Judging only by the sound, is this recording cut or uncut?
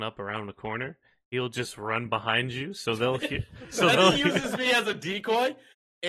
uncut